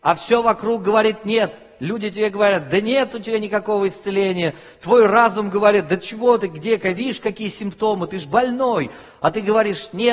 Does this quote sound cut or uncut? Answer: uncut